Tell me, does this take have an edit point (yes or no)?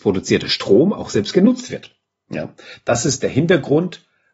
no